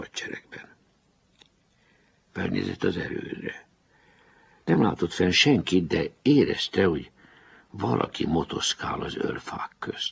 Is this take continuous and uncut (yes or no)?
yes